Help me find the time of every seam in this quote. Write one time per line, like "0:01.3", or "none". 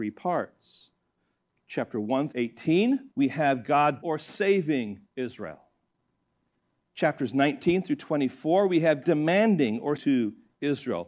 0:02.3
0:03.1
0:04.0
0:05.0
0:09.0
0:10.0